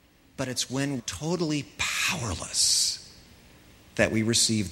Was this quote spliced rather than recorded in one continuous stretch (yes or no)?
yes